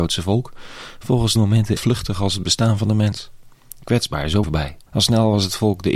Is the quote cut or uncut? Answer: cut